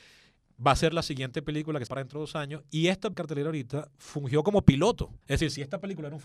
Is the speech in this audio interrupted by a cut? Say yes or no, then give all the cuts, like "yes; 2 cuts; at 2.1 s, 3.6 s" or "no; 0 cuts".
yes; 3 cuts; at 1.9 s, 3.1 s, 5.2 s